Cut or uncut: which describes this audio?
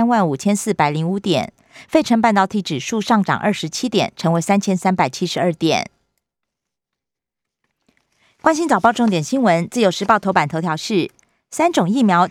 uncut